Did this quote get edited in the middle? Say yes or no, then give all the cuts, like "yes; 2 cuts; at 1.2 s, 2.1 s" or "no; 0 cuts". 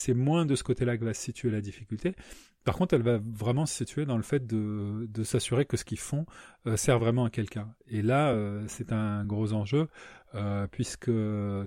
no; 0 cuts